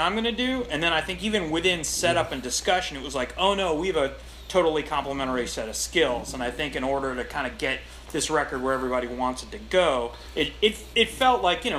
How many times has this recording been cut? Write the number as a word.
zero